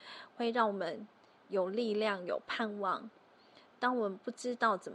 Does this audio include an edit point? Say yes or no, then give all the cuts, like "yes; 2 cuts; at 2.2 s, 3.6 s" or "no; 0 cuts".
no; 0 cuts